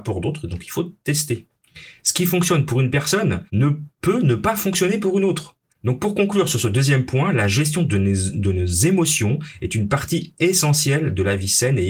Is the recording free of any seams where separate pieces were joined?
no; 2 cuts; at 3.5 s, 5.7 s

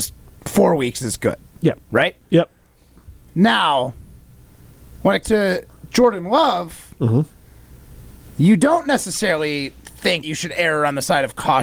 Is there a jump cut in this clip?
yes; 2 cuts; at 5.2 s, 10.2 s

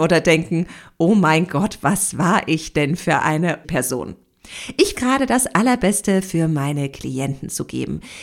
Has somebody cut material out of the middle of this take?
yes; 2 cuts; at 3.6 s, 4.9 s

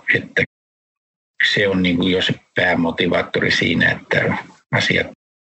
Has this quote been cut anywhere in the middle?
no; 0 cuts

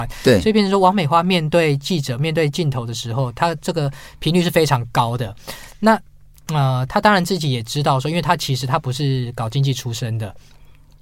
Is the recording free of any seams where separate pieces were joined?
yes; 0 cuts

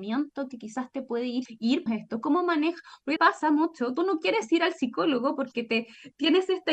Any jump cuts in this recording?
yes; 4 cuts; at 1.5 s, 1.9 s, 3.2 s, 4.0 s

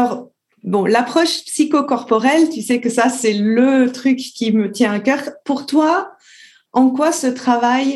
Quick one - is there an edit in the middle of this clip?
no; 0 cuts

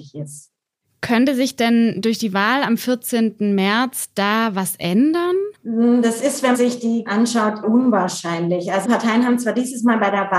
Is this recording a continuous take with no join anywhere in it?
no; 5 cuts; at 5.5 s, 6.5 s, 7.1 s, 7.6 s, 8.8 s

